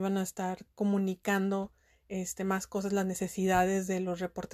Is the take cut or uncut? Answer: uncut